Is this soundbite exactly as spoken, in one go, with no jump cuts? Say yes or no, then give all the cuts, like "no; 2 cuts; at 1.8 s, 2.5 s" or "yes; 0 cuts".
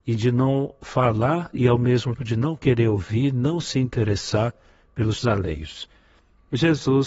no; 2 cuts; at 2.2 s, 5.2 s